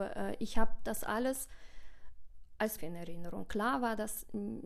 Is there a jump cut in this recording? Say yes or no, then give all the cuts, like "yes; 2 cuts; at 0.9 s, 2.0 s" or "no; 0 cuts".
yes; 1 cut; at 2.8 s